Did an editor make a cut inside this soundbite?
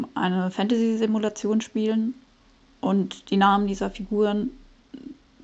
no; 0 cuts

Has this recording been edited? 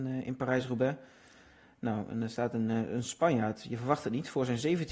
no; 0 cuts

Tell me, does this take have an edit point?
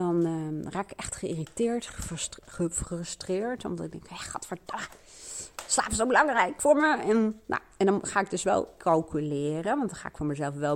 no; 0 cuts

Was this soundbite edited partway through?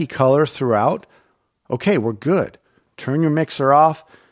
no; 0 cuts

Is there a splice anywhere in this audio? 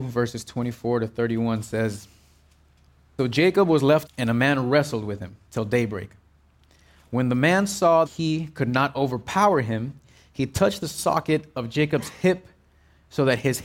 yes; 3 cuts; at 3.2 s, 4.1 s, 8.1 s

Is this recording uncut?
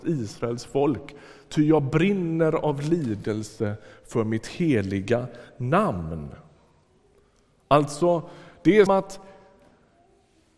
no; 1 cut; at 8.9 s

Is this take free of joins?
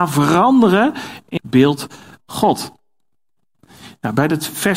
no; 2 cuts; at 1.4 s, 2.2 s

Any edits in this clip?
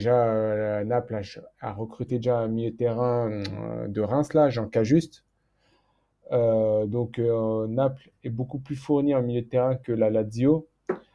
no; 0 cuts

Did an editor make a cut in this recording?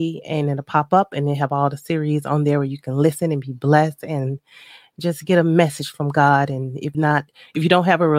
yes; 1 cut; at 6.9 s

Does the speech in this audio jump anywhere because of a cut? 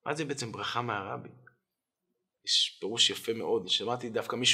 no; 0 cuts

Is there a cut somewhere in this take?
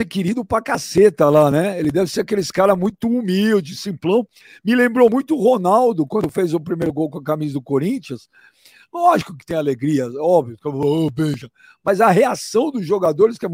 no; 0 cuts

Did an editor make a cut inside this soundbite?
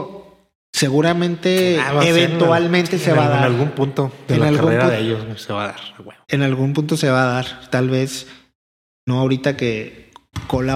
no; 0 cuts

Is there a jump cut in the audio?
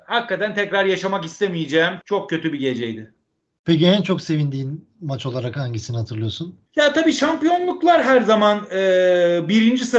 yes; 2 cuts; at 2.0 s, 6.7 s

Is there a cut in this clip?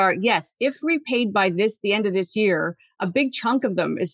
no; 0 cuts

